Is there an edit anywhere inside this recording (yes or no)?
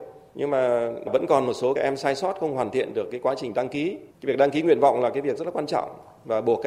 yes